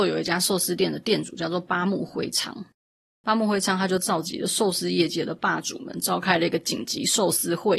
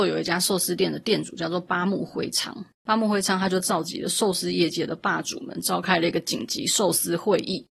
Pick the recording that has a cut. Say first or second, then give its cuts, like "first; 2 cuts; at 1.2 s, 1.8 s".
second; 1 cut; at 2.7 s